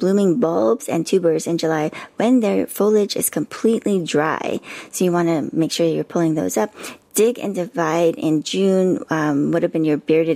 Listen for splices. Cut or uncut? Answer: uncut